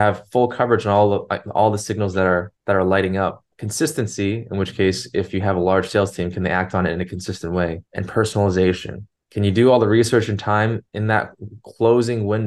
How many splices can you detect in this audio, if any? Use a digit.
5